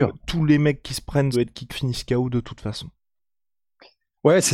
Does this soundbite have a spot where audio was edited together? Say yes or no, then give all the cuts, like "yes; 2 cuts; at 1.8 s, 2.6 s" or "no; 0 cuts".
yes; 2 cuts; at 1.3 s, 1.7 s